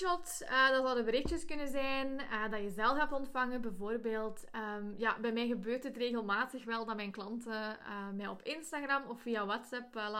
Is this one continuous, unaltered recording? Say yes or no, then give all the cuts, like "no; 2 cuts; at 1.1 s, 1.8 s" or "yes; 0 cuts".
yes; 0 cuts